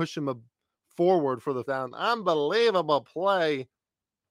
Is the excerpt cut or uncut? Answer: cut